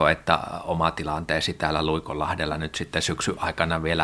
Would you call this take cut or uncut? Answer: uncut